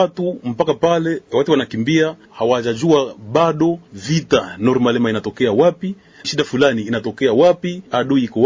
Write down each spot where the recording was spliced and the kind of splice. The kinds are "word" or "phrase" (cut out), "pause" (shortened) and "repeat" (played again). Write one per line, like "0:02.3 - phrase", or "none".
0:06.2 - word